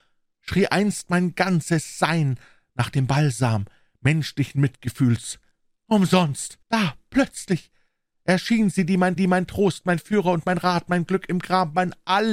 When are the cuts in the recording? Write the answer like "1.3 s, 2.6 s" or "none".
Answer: 6.6 s, 9.2 s